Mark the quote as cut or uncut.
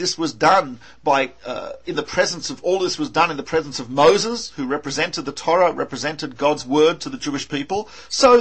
cut